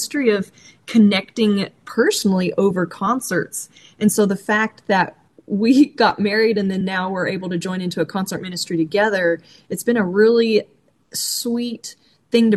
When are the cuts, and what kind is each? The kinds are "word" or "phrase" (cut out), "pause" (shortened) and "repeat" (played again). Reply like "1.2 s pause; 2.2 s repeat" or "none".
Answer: none